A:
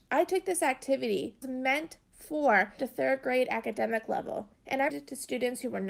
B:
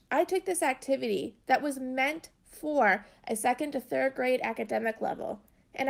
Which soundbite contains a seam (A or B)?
A